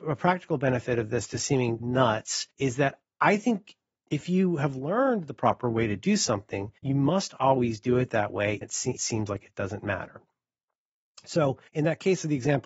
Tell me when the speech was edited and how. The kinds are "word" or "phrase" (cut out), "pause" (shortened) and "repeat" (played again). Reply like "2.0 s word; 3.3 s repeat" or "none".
1.8 s word; 2.5 s pause; 6.8 s pause; 8.6 s word; 9.0 s phrase; 11.7 s pause